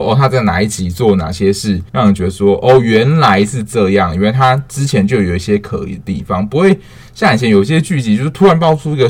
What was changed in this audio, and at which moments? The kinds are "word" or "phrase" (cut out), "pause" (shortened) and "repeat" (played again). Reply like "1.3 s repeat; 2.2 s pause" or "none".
1.9 s pause